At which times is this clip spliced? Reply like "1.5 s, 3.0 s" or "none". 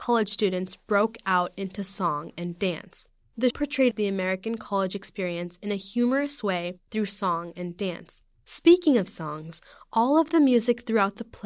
3.5 s